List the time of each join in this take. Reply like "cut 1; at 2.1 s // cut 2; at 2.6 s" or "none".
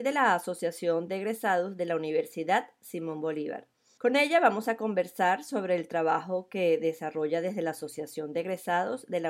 none